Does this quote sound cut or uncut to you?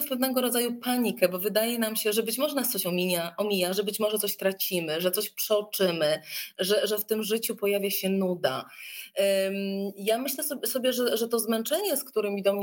uncut